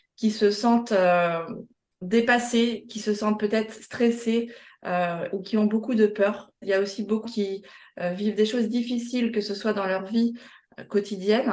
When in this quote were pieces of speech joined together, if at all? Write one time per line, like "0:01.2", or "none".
0:07.2